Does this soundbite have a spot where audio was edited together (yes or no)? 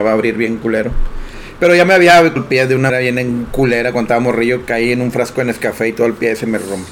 yes